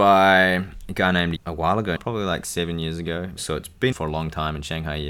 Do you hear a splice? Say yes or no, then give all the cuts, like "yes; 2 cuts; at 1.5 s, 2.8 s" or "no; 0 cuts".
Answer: yes; 3 cuts; at 1.4 s, 2.0 s, 3.9 s